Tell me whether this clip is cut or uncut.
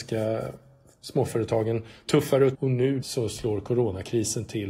cut